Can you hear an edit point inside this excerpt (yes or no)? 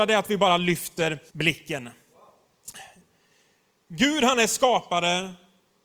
yes